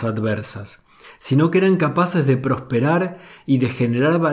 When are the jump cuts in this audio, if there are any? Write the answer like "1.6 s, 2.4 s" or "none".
none